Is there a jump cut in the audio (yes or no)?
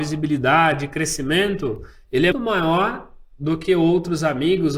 yes